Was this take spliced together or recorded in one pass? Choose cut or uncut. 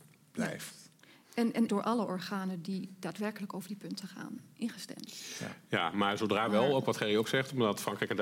cut